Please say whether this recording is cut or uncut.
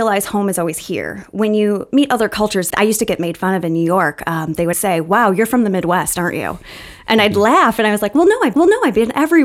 cut